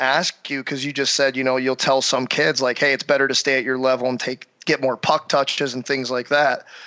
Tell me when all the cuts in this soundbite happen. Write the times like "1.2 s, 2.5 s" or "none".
none